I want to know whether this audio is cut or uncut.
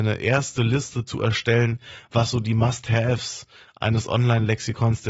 uncut